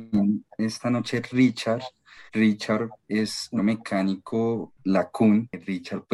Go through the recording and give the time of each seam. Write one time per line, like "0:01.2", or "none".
0:02.3
0:03.6
0:04.8